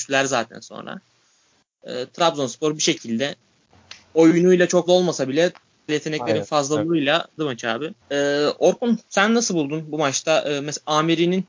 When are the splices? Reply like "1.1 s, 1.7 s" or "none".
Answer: 4.9 s, 5.9 s, 7.4 s, 8.0 s